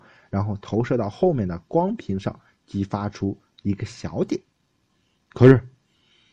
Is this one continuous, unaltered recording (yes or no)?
yes